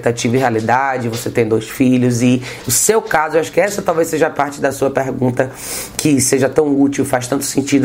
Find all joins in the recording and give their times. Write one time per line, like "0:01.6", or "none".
none